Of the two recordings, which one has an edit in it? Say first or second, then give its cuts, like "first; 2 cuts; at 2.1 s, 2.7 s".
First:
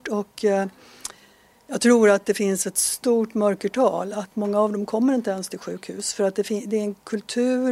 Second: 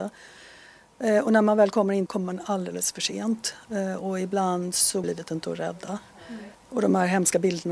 second; 3 cuts; at 2.1 s, 5.0 s, 6.5 s